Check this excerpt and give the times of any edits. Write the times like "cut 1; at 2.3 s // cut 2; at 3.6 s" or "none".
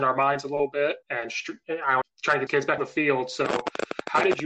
cut 1; at 1.0 s // cut 2; at 2.0 s // cut 3; at 2.5 s // cut 4; at 2.8 s